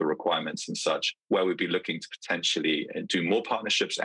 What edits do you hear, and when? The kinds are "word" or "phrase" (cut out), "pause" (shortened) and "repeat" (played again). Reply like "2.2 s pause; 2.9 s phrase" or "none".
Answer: 1.2 s pause